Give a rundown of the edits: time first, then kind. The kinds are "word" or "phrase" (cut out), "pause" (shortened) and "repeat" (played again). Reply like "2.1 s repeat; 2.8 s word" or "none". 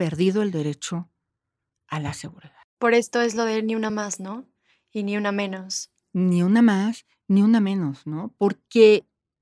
none